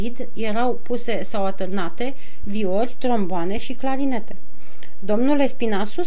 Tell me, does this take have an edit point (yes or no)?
no